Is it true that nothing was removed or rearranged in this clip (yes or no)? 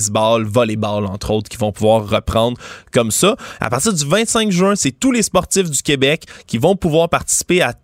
yes